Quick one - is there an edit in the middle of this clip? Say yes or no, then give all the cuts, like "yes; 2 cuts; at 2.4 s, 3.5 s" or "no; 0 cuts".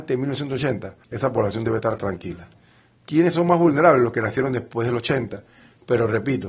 yes; 1 cut; at 1.0 s